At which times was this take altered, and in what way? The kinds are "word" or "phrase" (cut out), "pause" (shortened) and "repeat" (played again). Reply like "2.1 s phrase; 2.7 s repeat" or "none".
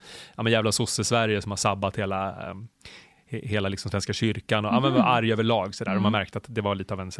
none

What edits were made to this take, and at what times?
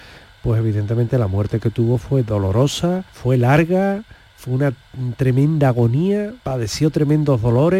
3.1 s pause; 6.4 s word

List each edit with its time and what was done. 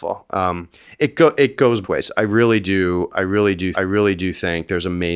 1.8 s word; 3.7 s repeat

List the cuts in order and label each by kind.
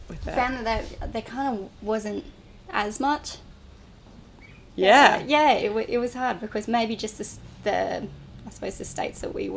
none

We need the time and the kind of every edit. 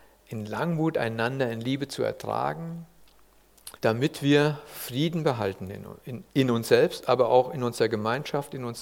3.8 s pause; 6.3 s word

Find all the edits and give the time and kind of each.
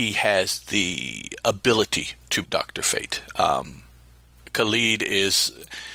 2.4 s word

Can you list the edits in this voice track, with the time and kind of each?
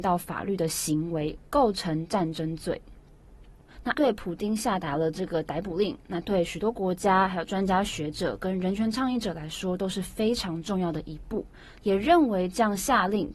3.9 s word

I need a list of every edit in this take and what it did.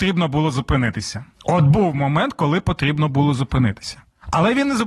1.3 s pause

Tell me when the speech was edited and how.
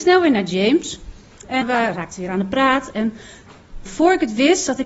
1.6 s word; 3.9 s word

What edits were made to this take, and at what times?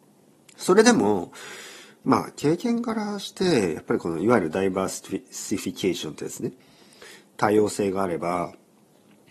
none

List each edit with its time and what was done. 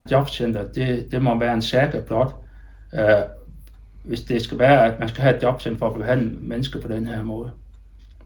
none

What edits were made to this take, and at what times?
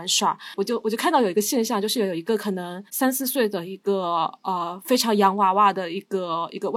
2.9 s pause

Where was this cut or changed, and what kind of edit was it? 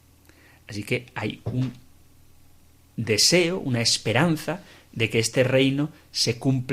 none

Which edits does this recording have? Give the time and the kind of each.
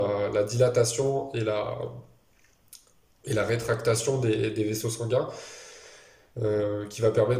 none

